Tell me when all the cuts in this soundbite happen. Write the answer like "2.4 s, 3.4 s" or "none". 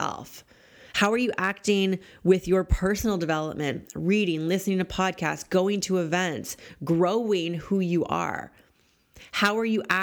none